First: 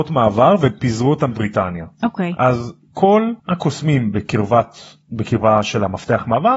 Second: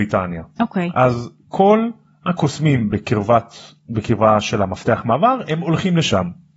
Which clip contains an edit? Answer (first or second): first